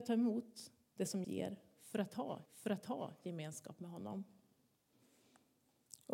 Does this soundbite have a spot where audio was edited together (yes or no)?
yes